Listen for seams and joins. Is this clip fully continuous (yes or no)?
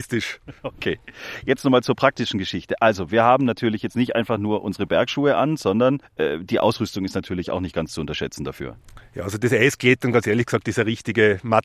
no